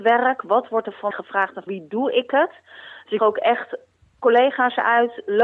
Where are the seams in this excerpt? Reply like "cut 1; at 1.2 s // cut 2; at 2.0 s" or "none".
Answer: cut 1; at 1.1 s // cut 2; at 1.7 s // cut 3; at 3.2 s